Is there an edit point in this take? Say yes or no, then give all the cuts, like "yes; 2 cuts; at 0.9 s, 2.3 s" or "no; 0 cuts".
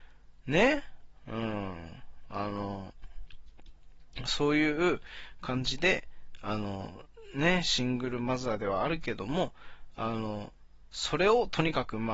no; 0 cuts